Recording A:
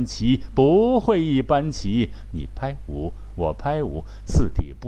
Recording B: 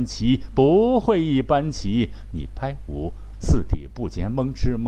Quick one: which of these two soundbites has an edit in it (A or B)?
B